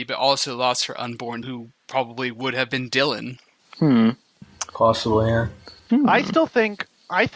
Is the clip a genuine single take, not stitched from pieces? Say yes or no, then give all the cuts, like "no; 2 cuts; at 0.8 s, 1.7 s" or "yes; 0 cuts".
no; 3 cuts; at 1.4 s, 3.6 s, 5.8 s